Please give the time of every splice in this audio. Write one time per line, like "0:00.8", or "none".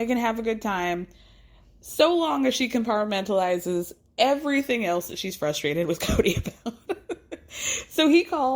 none